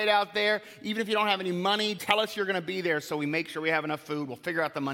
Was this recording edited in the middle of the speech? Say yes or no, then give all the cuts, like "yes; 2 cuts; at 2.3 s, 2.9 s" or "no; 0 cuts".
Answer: yes; 1 cut; at 2.0 s